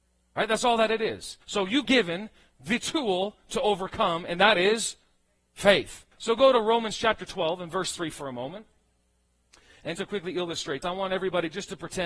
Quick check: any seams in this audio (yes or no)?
yes